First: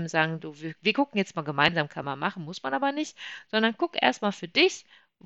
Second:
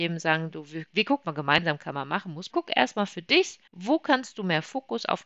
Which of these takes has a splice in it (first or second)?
second